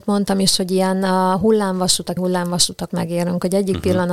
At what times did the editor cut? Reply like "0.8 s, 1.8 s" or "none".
2.2 s, 2.9 s